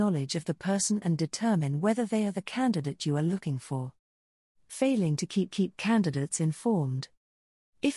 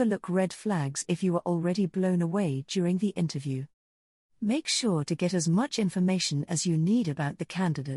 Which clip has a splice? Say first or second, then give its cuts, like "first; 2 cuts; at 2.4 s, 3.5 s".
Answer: first; 1 cut; at 5.5 s